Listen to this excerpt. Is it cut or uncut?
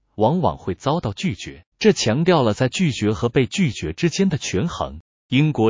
cut